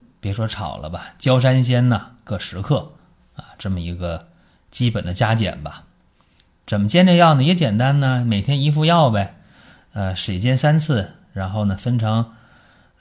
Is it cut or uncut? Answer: uncut